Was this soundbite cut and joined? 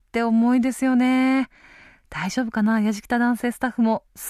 no; 0 cuts

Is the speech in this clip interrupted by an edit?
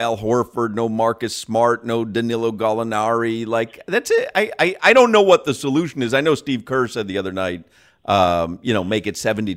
no; 0 cuts

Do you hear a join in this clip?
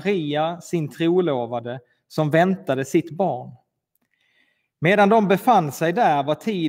no; 0 cuts

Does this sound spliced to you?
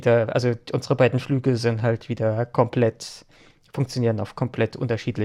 no; 0 cuts

